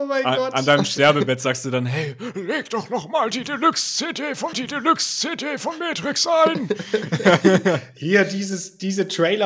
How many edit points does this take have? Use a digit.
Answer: 1